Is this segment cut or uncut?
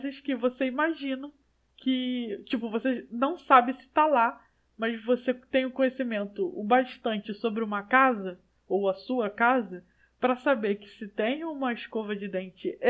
uncut